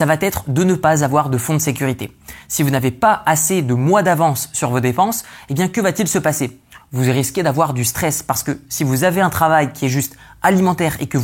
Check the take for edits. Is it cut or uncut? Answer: uncut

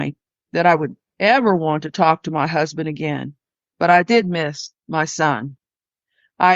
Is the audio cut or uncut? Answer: uncut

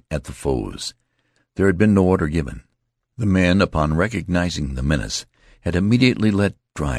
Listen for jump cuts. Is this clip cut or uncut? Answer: uncut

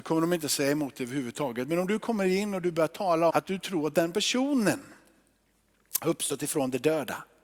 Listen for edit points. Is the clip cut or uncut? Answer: cut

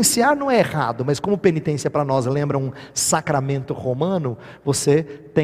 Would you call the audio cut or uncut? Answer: uncut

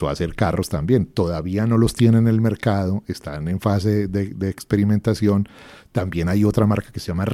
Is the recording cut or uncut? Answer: uncut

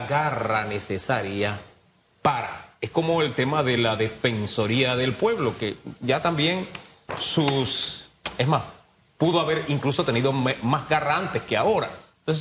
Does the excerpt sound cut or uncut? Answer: uncut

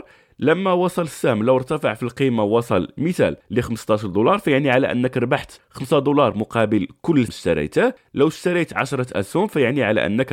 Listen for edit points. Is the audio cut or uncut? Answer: cut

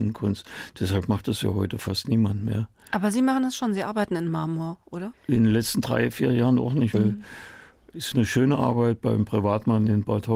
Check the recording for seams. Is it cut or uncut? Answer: cut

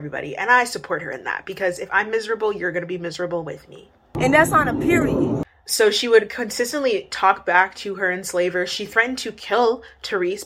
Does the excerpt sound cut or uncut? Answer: uncut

